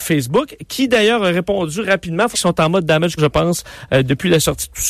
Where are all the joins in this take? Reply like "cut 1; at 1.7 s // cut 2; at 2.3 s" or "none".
cut 1; at 2.3 s // cut 2; at 3.2 s